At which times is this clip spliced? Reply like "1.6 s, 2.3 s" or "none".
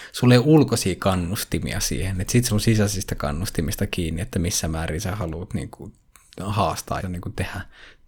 2.5 s, 7.0 s